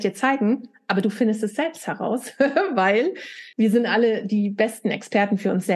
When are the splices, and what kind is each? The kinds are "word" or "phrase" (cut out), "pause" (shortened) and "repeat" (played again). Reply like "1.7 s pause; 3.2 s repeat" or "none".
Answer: 3.5 s pause